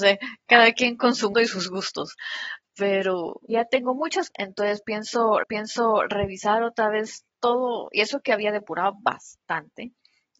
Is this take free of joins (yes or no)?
no